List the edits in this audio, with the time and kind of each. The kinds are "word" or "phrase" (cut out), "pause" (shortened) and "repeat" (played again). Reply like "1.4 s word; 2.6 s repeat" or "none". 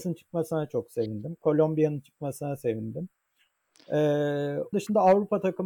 4.7 s word